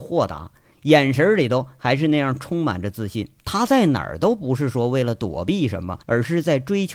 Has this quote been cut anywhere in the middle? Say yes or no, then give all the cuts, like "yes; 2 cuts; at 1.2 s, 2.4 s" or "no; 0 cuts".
yes; 2 cuts; at 3.4 s, 6.0 s